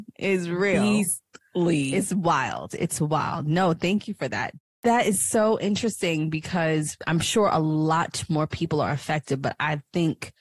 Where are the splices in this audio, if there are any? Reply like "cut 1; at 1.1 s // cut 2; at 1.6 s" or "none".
none